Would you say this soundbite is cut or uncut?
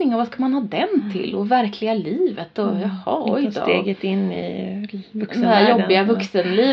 uncut